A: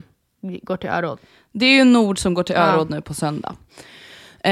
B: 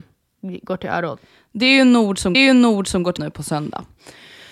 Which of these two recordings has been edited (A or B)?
B